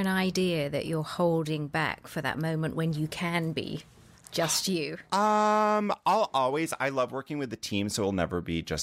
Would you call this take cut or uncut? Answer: uncut